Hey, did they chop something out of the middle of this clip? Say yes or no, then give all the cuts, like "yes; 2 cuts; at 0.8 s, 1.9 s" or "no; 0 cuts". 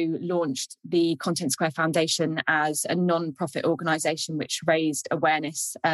no; 0 cuts